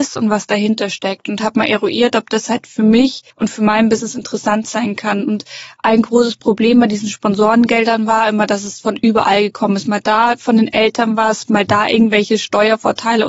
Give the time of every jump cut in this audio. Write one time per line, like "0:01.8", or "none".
0:03.3